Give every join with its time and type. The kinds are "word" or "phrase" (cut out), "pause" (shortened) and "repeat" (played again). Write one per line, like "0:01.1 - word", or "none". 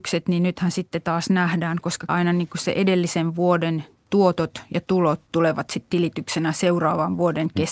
0:02.1 - phrase